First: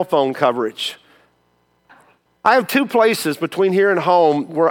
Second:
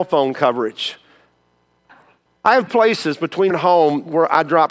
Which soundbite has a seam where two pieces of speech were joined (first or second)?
second